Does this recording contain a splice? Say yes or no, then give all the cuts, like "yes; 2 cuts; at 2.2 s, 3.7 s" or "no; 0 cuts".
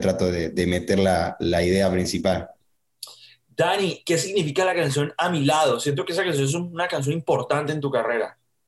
no; 0 cuts